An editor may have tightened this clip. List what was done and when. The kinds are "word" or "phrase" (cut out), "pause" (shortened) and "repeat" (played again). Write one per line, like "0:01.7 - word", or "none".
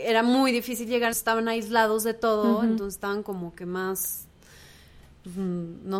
0:01.1 - word